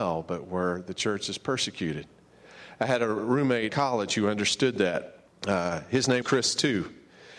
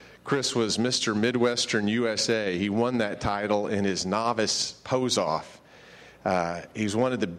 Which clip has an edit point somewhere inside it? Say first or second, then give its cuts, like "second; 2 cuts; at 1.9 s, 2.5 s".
first; 3 cuts; at 3.7 s, 5.3 s, 6.2 s